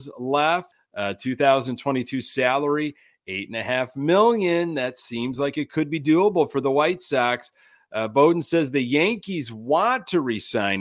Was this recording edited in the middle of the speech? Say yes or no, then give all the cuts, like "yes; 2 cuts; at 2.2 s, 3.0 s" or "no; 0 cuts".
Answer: no; 0 cuts